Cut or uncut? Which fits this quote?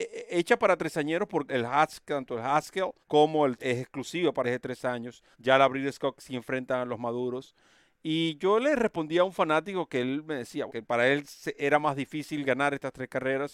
cut